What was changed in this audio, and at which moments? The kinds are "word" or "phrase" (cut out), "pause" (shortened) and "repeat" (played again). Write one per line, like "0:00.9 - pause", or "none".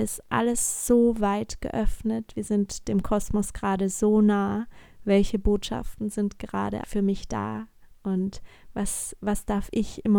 0:06.8 - word